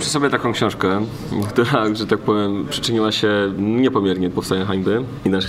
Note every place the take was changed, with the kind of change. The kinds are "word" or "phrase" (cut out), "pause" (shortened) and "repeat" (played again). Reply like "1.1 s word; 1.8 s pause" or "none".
4.3 s word